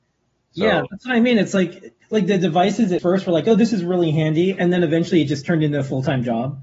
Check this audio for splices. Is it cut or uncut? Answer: cut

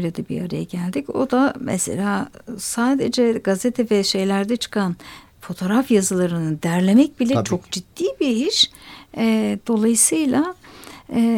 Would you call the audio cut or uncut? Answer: uncut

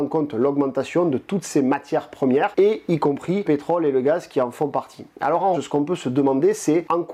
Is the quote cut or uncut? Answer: cut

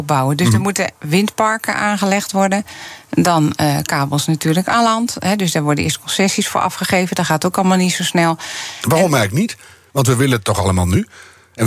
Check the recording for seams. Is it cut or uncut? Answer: uncut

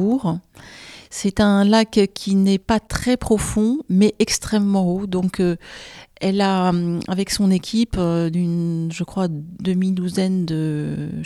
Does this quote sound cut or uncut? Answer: uncut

